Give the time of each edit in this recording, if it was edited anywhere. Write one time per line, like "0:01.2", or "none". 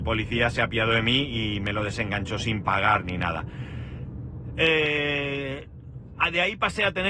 none